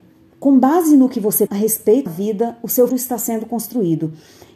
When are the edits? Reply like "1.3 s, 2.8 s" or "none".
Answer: 1.5 s, 2.1 s, 2.9 s